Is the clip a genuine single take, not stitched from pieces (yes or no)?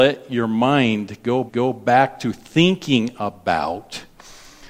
no